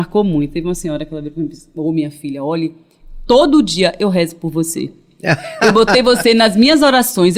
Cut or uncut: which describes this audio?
uncut